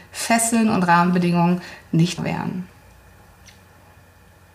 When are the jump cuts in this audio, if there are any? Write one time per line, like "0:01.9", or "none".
0:02.2